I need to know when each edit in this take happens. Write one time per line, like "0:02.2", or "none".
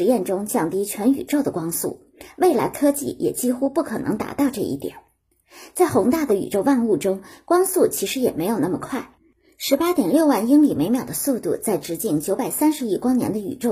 none